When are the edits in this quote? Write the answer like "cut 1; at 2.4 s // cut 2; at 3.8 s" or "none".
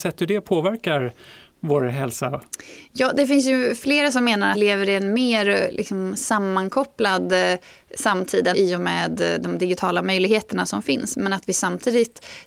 cut 1; at 4.5 s // cut 2; at 8.5 s